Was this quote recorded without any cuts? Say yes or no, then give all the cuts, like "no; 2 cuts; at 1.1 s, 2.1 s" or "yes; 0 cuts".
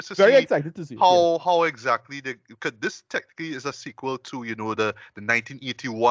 yes; 0 cuts